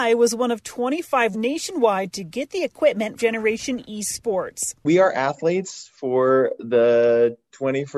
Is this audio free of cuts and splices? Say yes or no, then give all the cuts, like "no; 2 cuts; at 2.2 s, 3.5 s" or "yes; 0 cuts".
no; 2 cuts; at 1.3 s, 3.2 s